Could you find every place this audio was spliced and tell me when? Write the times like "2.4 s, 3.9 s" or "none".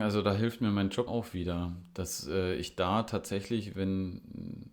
1.1 s